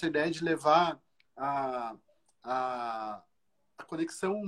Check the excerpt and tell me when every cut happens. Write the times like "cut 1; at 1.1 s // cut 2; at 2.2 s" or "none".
none